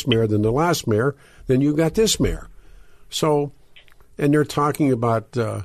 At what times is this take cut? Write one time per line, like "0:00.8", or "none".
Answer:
none